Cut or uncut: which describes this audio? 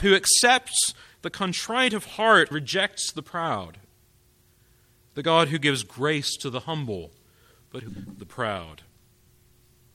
cut